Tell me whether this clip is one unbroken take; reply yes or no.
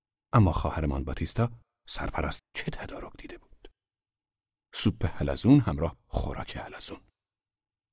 no